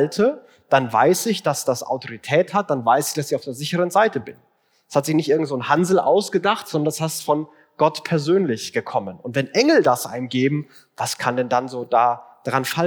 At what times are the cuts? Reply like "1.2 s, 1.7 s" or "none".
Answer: none